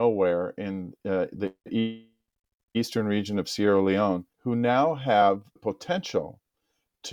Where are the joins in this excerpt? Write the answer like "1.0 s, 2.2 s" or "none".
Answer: 1.6 s, 4.3 s, 5.6 s